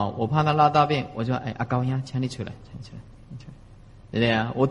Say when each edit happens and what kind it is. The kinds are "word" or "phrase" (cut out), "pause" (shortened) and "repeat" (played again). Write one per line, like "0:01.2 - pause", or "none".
none